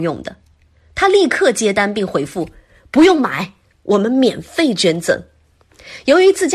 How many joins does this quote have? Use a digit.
0